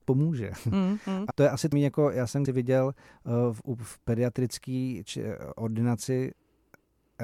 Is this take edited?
yes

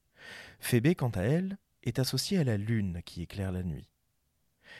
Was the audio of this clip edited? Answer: no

